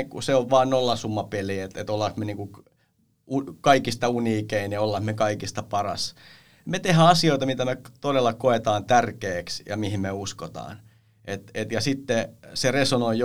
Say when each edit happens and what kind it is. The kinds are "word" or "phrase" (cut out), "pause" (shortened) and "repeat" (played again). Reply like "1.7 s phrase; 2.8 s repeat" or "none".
none